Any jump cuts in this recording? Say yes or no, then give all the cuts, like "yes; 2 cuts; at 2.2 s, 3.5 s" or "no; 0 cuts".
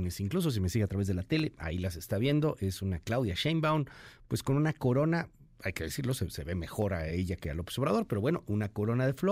no; 0 cuts